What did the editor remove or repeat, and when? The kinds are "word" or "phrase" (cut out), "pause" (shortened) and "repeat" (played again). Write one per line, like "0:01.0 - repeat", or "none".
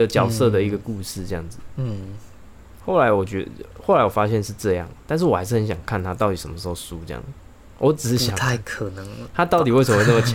0:07.5 - pause